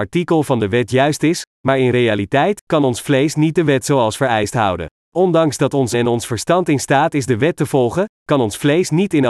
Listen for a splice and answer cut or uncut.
cut